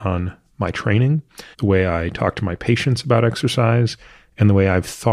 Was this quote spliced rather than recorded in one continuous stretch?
yes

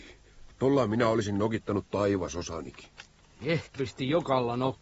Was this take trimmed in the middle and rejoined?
yes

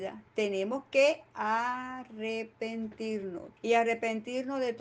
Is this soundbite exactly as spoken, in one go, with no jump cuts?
no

